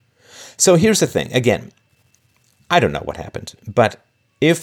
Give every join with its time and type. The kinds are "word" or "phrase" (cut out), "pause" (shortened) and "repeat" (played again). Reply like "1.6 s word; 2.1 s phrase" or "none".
none